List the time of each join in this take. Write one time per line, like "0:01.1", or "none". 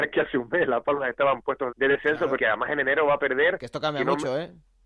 0:01.7
0:02.4